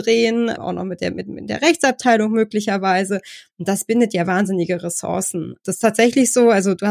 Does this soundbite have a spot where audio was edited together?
no; 0 cuts

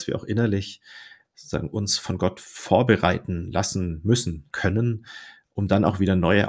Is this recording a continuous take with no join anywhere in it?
no; 1 cut; at 4.5 s

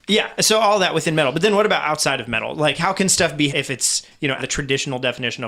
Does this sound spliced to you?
yes; 2 cuts; at 3.5 s, 4.4 s

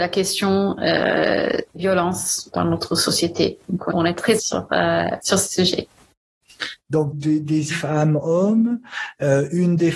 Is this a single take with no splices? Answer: no; 6 cuts; at 1.8 s, 2.5 s, 3.9 s, 4.4 s, 7.1 s, 7.7 s

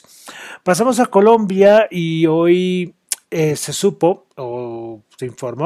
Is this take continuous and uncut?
yes; 0 cuts

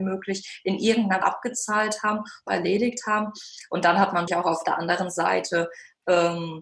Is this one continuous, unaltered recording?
no; 3 cuts; at 1.2 s, 2.5 s, 4.3 s

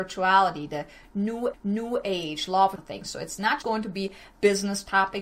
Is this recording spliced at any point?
yes; 3 cuts; at 1.5 s, 2.8 s, 3.6 s

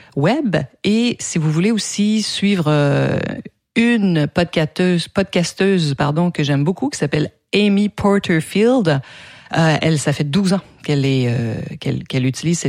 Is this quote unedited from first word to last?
yes; 0 cuts

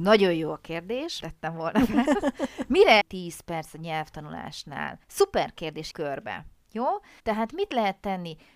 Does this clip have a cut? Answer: yes; 5 cuts; at 1.2 s, 3.0 s, 5.0 s, 5.9 s, 7.2 s

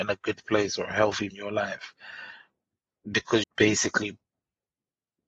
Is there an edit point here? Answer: yes; 2 cuts; at 1.3 s, 3.4 s

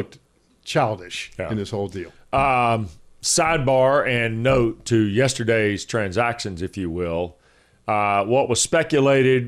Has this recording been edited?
no; 0 cuts

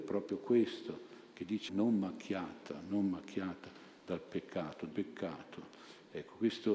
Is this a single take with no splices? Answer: no; 2 cuts; at 1.7 s, 4.9 s

